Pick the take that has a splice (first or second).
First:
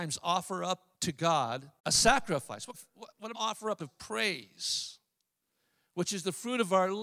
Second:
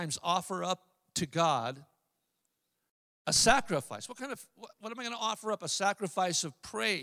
first